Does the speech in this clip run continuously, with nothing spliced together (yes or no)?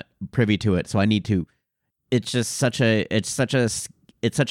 yes